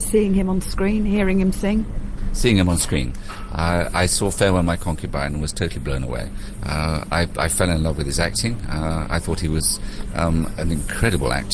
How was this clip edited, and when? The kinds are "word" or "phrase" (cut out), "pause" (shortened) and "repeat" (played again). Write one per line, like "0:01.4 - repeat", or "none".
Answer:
none